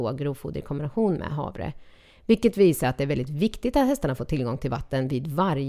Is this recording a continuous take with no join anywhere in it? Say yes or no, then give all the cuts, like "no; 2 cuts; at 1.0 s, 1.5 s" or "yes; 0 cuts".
yes; 0 cuts